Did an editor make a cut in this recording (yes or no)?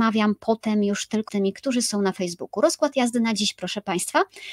yes